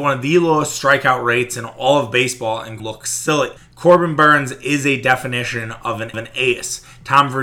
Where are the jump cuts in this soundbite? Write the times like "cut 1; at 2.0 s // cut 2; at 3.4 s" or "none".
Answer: cut 1; at 2.8 s // cut 2; at 3.6 s // cut 3; at 6.1 s

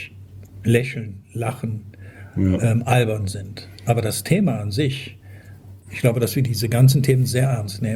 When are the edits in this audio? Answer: none

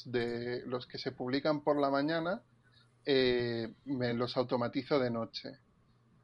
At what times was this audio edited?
none

